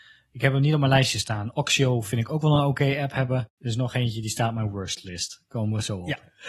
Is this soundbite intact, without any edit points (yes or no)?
yes